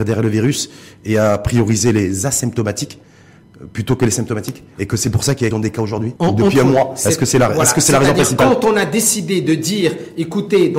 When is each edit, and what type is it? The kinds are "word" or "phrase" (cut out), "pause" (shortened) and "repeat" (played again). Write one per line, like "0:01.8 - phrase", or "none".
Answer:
0:05.5 - word
0:06.2 - pause